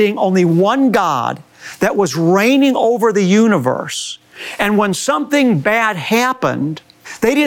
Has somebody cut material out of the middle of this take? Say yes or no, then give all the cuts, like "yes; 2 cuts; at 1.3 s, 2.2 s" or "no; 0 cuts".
no; 0 cuts